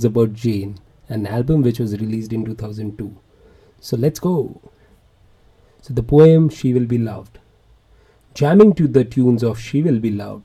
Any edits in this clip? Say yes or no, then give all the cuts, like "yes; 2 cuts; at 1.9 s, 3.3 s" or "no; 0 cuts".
no; 0 cuts